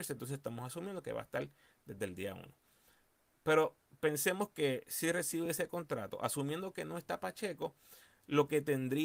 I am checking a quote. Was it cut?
no; 0 cuts

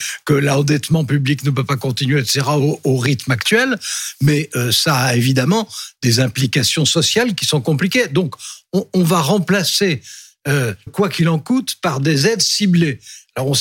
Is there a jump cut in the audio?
yes; 1 cut; at 10.9 s

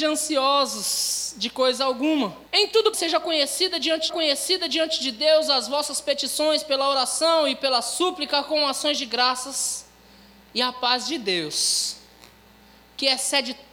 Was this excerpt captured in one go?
no; 3 cuts; at 2.5 s, 2.9 s, 4.1 s

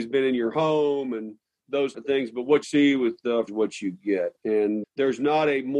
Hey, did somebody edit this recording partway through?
yes; 4 cuts; at 1.9 s, 2.6 s, 3.5 s, 4.8 s

